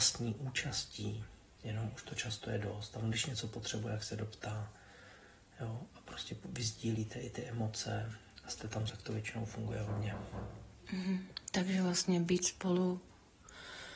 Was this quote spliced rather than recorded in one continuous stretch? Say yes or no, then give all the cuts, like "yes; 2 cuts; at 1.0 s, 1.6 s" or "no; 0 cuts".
yes; 1 cut; at 8.9 s